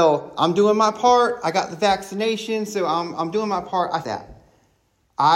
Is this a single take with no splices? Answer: no; 1 cut; at 4.0 s

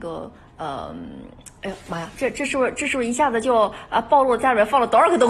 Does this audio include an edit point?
no; 0 cuts

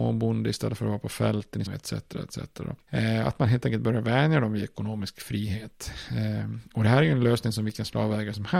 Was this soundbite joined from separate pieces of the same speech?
yes; 1 cut; at 1.7 s

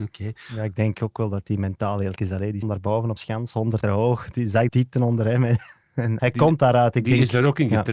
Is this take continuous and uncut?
no; 6 cuts; at 2.2 s, 2.6 s, 3.2 s, 3.8 s, 4.7 s, 6.2 s

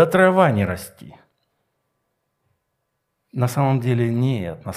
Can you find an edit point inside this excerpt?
no; 0 cuts

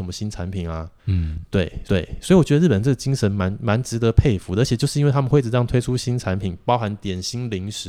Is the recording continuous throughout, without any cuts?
no; 2 cuts; at 1.0 s, 1.8 s

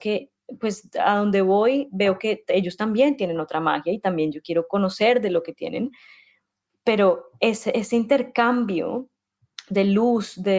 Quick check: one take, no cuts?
yes; 0 cuts

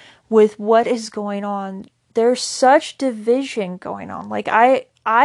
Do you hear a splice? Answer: no; 0 cuts

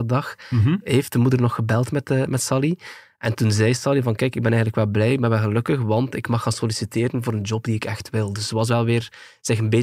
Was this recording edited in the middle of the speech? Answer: no; 0 cuts

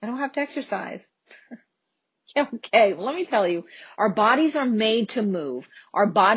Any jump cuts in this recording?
no; 0 cuts

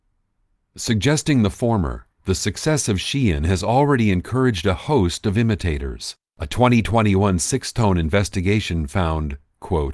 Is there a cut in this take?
yes; 2 cuts; at 2.1 s, 6.3 s

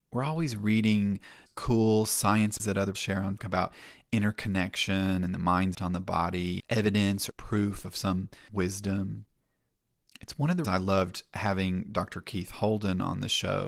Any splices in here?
yes; 9 cuts; at 1.5 s, 2.6 s, 2.9 s, 3.4 s, 5.7 s, 6.6 s, 7.3 s, 8.5 s, 10.6 s

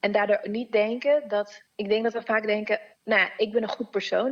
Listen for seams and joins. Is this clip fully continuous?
no; 1 cut; at 1.7 s

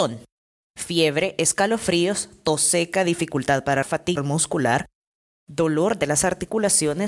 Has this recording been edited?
yes; 2 cuts; at 3.8 s, 4.2 s

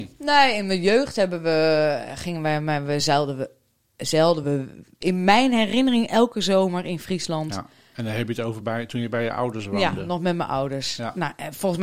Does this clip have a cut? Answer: no; 0 cuts

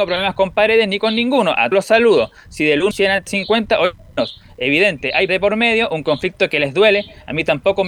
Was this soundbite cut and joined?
yes; 4 cuts; at 1.7 s, 2.9 s, 3.3 s, 5.3 s

